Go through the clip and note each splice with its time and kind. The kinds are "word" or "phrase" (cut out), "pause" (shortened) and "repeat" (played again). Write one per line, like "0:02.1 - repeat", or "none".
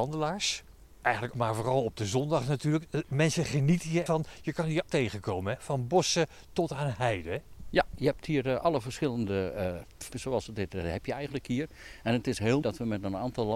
0:01.3 - word
0:04.1 - word
0:04.9 - word
0:10.1 - word
0:12.6 - word